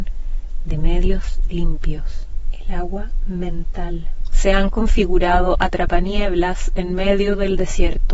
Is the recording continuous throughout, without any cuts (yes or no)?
yes